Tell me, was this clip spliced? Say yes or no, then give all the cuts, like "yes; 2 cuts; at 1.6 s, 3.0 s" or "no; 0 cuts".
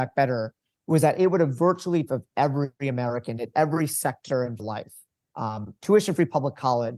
yes; 2 cuts; at 2.1 s, 4.6 s